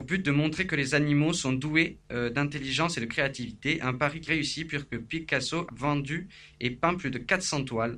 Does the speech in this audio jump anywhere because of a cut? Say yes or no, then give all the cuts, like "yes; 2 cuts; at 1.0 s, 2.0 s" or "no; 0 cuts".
yes; 3 cuts; at 2.0 s, 4.3 s, 5.7 s